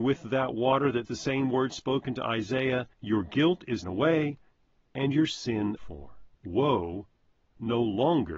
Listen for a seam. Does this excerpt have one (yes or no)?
yes